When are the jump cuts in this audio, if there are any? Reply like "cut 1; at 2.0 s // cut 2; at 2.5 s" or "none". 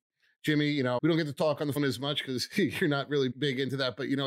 cut 1; at 1.0 s // cut 2; at 1.8 s // cut 3; at 3.3 s